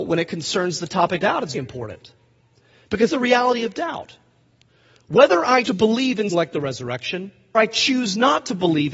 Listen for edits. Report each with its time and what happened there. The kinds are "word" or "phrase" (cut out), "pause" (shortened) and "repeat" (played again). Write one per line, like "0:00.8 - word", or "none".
0:01.2 - word
0:01.5 - word
0:03.1 - word
0:05.6 - word
0:06.3 - word
0:07.5 - word